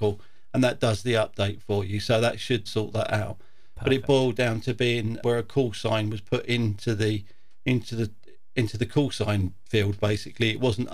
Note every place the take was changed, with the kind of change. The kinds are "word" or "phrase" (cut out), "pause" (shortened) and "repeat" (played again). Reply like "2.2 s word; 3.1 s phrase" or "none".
2.7 s word; 5.2 s word